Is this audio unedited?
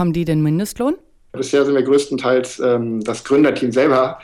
yes; 0 cuts

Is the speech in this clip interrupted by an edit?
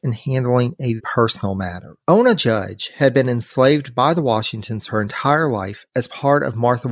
yes; 2 cuts; at 1.0 s, 2.0 s

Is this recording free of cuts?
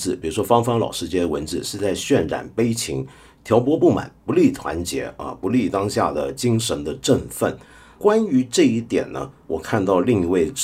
yes; 0 cuts

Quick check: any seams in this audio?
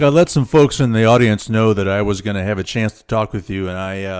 no; 0 cuts

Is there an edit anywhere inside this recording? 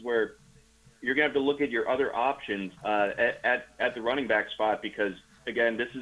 yes; 1 cut; at 2.8 s

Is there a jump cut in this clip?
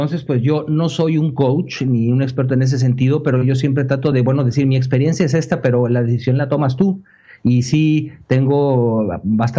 no; 0 cuts

